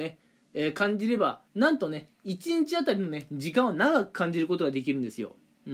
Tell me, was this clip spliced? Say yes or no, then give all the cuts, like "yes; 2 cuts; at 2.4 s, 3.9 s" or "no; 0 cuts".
yes; 1 cut; at 1.5 s